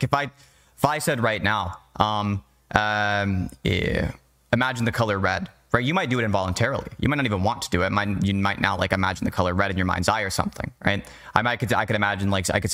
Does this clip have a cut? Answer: no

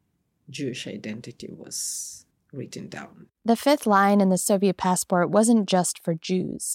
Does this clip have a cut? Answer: yes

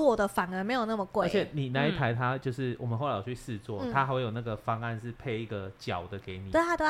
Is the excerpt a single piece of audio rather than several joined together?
yes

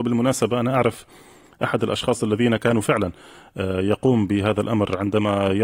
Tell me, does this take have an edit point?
no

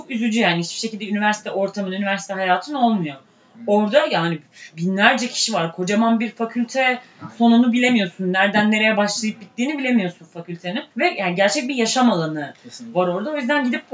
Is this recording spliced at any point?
yes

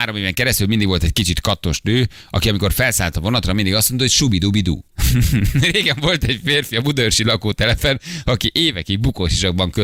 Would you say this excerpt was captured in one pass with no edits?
no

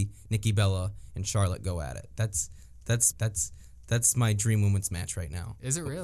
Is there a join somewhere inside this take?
yes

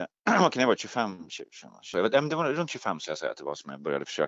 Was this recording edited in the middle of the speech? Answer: no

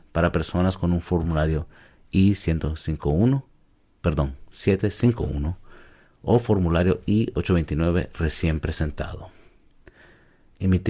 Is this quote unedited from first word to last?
yes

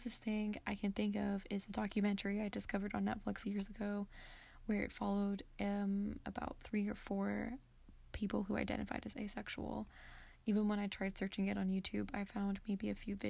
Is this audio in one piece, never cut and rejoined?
no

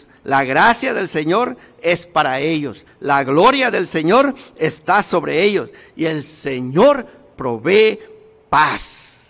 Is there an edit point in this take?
no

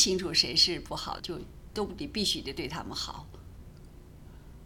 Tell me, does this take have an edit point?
yes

